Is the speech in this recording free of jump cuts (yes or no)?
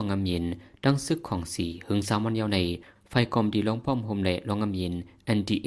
yes